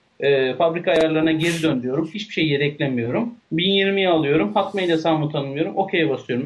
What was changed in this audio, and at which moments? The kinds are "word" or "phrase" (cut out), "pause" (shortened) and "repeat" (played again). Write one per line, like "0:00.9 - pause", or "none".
0:03.4 - pause

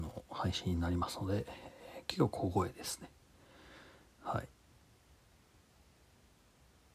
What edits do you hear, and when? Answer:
none

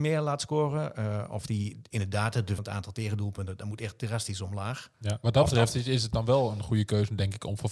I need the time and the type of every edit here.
0:02.6 - phrase

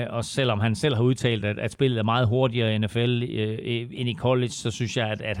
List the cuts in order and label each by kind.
none

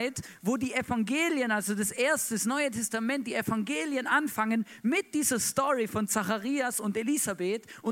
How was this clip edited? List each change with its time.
none

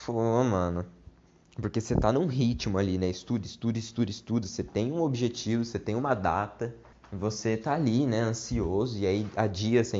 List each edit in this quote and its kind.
0:01.3 - pause
0:06.9 - pause

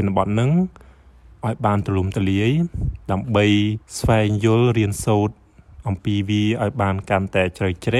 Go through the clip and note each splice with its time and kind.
0:03.8 - pause

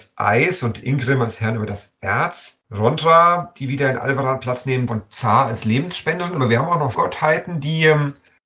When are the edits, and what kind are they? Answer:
0:02.6 - pause
0:04.9 - word
0:06.9 - word

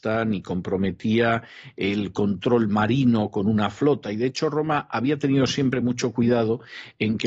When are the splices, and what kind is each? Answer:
none

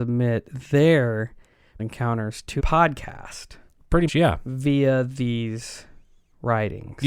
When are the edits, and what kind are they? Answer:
0:01.8 - word
0:02.6 - word
0:04.1 - word

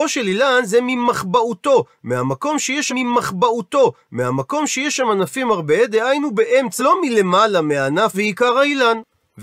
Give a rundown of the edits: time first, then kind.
0:02.9 - repeat
0:06.8 - phrase
0:08.1 - phrase

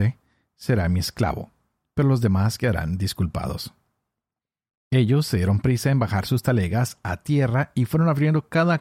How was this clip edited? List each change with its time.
none

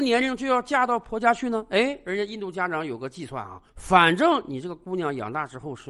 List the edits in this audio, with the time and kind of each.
0:03.7 - pause

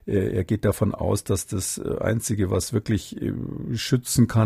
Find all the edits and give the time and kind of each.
none

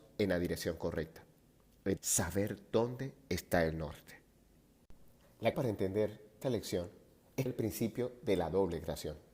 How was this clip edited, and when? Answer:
0:02.0 - word
0:05.5 - word
0:06.4 - word
0:07.5 - word

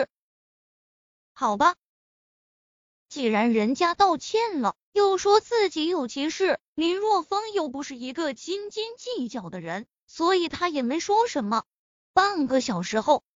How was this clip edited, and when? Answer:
0:11.8 - pause

